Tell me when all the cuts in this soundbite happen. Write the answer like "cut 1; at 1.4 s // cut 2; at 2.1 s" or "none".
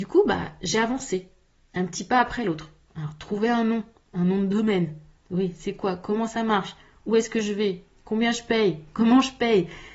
none